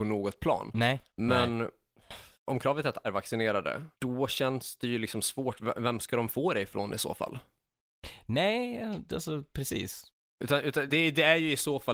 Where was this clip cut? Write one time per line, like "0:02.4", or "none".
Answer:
0:01.1
0:02.3
0:03.0
0:03.9
0:10.9